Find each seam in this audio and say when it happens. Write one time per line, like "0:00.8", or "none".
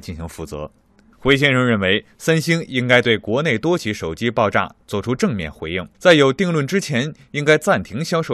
0:05.9